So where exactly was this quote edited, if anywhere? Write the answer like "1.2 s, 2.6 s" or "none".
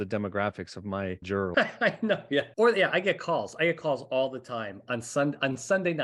1.2 s, 1.5 s, 2.5 s